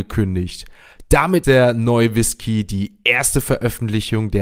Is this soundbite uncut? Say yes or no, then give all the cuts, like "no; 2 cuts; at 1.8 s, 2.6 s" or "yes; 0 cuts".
no; 1 cut; at 1.4 s